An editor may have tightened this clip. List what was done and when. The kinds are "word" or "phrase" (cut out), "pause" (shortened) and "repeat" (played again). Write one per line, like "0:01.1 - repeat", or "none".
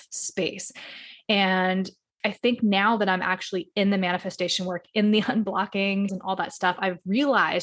0:06.1 - word